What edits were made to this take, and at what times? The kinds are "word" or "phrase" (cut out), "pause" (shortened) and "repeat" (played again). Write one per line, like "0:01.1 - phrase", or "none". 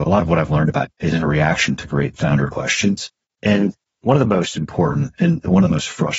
0:00.9 - word